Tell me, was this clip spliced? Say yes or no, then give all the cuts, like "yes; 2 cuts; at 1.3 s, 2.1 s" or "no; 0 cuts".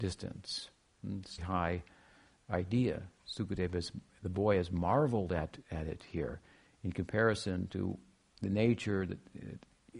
yes; 1 cut; at 1.4 s